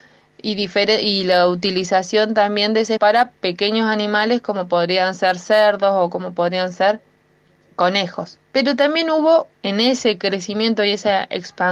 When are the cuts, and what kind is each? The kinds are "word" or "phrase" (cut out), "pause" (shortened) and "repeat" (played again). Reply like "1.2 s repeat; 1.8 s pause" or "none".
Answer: 3.0 s word; 8.4 s pause; 9.5 s pause